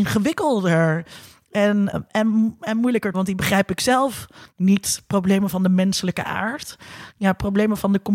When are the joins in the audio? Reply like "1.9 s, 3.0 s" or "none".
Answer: 1.9 s, 3.1 s